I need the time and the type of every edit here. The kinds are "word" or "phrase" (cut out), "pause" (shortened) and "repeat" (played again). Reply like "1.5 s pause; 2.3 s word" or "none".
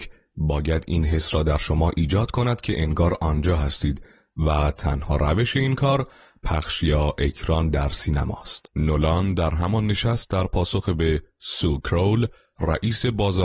8.7 s pause